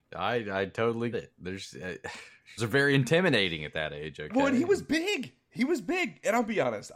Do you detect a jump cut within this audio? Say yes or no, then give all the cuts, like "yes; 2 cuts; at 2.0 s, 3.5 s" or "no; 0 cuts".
yes; 2 cuts; at 1.1 s, 2.6 s